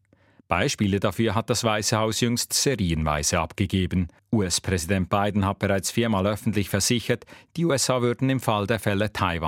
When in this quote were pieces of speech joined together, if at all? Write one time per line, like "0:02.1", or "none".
0:04.2

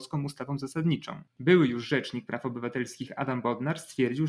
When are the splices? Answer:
none

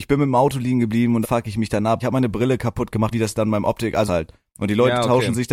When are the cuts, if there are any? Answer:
0:01.2
0:02.0
0:03.1
0:04.1

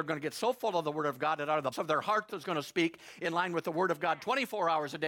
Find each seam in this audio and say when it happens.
0:01.7
0:02.3

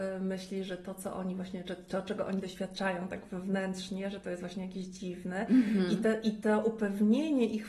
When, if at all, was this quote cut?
none

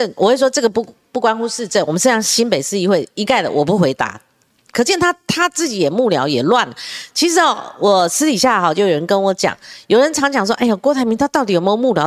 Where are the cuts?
none

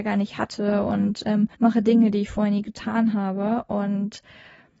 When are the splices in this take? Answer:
0:01.5

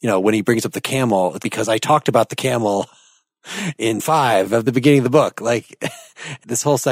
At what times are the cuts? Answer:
0:01.4
0:04.0
0:04.7

